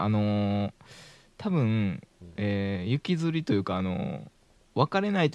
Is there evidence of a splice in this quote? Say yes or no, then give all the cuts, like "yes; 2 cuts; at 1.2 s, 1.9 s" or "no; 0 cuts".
no; 0 cuts